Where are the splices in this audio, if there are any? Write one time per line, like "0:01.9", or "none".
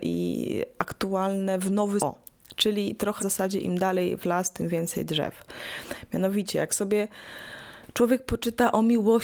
0:02.0
0:03.2

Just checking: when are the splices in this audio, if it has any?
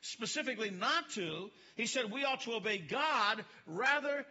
none

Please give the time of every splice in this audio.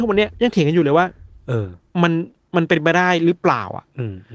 0:01.8

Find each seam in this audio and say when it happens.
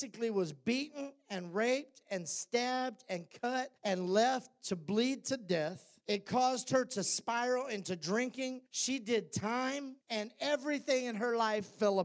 0:03.8
0:06.0
0:08.7
0:10.0

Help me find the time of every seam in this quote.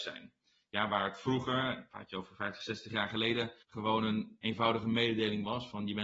0:03.6

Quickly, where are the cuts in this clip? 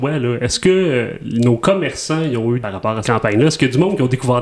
0:02.6
0:03.0

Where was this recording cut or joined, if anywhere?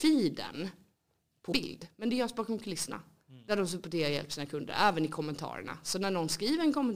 0:01.5

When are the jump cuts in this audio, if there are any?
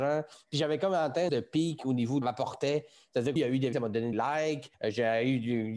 0:01.3
0:02.2
0:03.4
0:03.7
0:04.1
0:04.7

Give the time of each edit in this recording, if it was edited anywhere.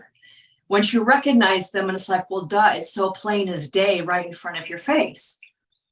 none

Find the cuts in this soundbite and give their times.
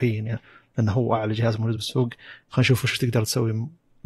none

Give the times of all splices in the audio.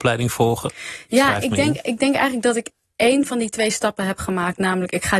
none

